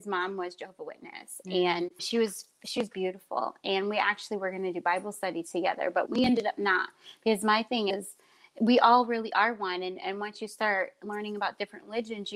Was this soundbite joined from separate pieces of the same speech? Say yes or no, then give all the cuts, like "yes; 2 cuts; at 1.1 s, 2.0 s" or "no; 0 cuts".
no; 0 cuts